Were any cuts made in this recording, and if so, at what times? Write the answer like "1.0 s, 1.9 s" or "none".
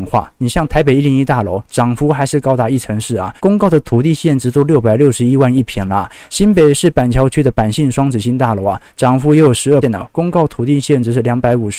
3.4 s, 9.8 s